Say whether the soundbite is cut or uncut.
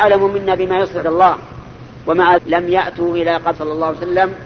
cut